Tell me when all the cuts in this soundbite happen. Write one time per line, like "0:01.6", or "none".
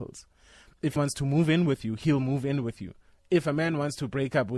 0:01.0